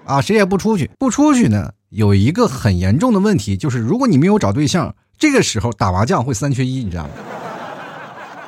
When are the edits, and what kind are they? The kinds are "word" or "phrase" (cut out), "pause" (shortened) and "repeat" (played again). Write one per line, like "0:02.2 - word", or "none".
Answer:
0:00.9 - pause